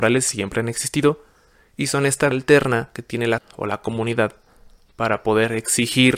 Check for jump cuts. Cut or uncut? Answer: cut